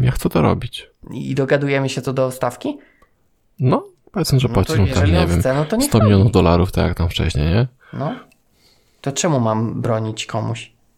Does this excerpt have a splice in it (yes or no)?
no